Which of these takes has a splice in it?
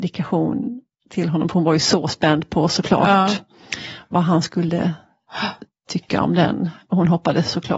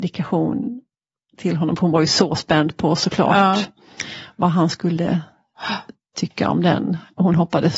first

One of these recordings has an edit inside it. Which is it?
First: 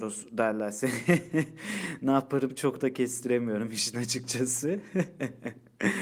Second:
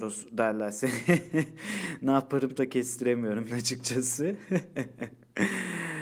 second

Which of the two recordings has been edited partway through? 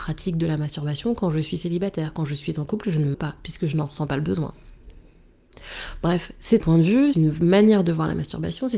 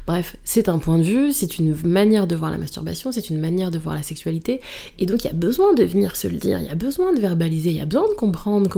first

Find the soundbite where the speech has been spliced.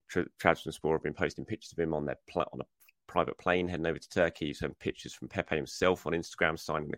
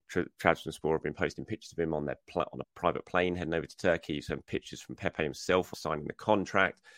second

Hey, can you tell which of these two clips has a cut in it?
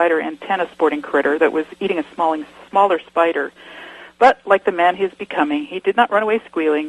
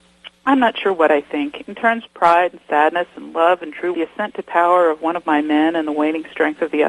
second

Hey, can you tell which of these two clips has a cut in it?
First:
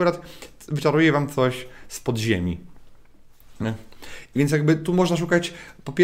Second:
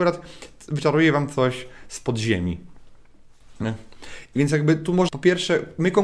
second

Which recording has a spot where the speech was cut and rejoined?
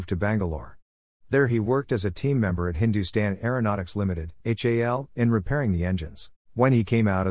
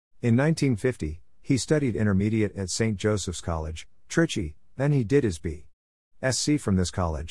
first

